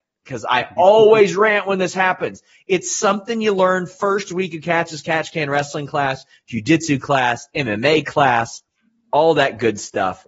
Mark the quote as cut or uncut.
uncut